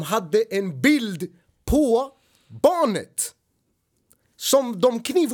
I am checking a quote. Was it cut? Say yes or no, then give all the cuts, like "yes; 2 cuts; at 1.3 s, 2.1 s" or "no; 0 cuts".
no; 0 cuts